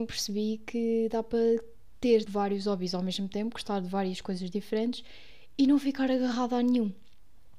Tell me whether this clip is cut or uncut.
cut